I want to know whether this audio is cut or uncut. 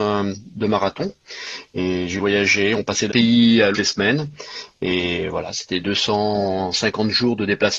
cut